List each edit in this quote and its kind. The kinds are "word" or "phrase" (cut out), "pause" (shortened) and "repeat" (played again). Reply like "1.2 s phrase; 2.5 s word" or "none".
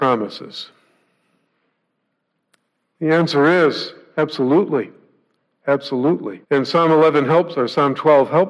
6.4 s pause